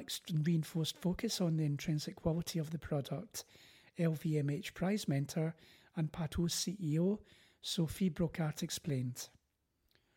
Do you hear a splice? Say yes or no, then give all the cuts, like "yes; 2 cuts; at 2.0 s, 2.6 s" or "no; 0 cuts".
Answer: no; 0 cuts